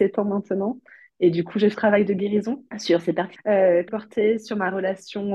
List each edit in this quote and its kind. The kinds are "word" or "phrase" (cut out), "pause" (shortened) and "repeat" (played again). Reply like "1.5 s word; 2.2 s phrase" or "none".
1.7 s phrase; 2.7 s pause; 3.4 s word; 3.9 s word